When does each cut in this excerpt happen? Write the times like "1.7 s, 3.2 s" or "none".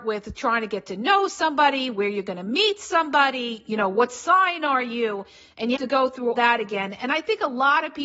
5.8 s, 6.3 s